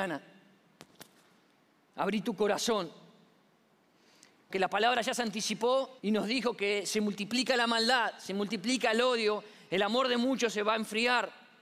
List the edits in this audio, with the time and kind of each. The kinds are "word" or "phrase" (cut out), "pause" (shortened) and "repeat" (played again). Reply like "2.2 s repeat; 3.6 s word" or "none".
4.5 s word; 6.0 s pause